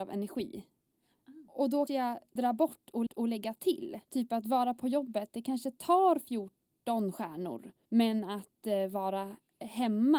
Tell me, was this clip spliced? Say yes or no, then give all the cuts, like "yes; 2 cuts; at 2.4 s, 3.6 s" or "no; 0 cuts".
yes; 5 cuts; at 1.9 s, 2.4 s, 3.1 s, 4.0 s, 7.8 s